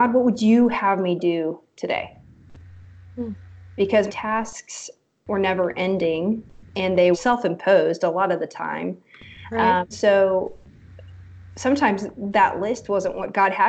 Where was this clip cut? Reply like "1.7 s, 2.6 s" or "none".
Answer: 4.1 s, 7.1 s, 9.9 s